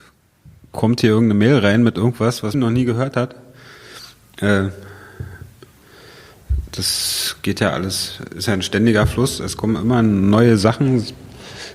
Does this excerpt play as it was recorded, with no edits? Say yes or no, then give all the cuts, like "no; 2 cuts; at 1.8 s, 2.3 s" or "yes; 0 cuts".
no; 1 cut; at 2.5 s